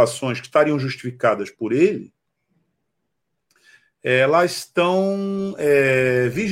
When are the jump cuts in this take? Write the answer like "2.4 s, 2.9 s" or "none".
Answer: none